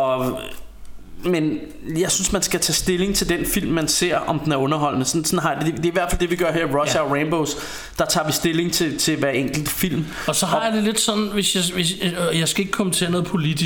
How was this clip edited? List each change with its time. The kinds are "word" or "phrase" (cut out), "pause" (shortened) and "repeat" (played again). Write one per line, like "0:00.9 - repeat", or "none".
none